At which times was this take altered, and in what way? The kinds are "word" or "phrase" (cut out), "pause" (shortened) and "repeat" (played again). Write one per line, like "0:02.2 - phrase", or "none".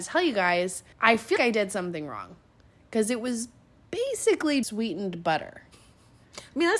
0:00.9 - pause
0:01.4 - word
0:04.6 - word